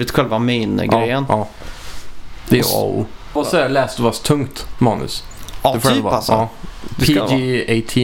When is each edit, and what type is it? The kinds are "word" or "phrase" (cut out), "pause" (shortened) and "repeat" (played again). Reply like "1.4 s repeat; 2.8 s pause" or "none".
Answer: 3.4 s phrase